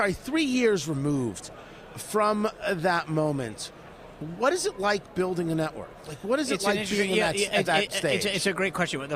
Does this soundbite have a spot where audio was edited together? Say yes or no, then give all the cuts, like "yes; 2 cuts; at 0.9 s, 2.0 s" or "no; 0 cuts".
no; 0 cuts